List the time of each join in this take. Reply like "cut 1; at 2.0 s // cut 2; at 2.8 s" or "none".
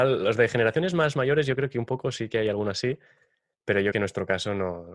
cut 1; at 3.9 s